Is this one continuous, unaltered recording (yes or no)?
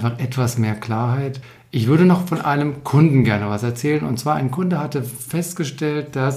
yes